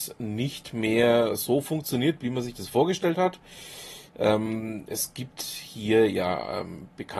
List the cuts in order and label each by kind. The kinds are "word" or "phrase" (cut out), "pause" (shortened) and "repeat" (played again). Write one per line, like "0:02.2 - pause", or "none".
none